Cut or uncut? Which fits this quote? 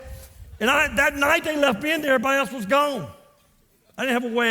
uncut